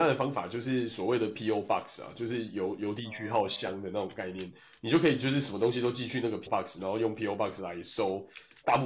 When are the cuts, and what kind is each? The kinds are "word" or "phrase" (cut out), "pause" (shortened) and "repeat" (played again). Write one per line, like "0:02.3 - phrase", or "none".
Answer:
0:06.5 - word